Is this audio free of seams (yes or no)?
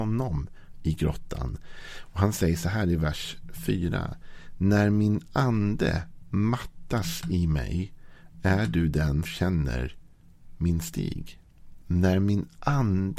no